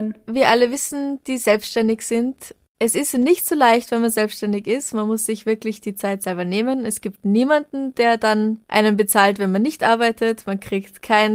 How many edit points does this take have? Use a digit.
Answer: 0